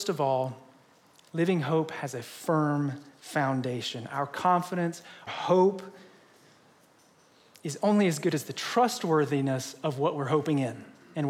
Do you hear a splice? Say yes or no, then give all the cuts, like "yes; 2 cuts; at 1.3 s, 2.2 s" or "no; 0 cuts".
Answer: yes; 1 cut; at 5.3 s